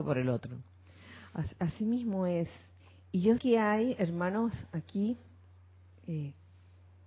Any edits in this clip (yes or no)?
yes